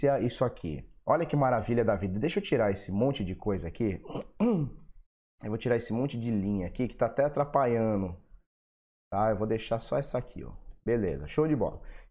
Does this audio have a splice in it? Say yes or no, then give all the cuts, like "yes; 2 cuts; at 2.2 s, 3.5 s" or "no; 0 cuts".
no; 0 cuts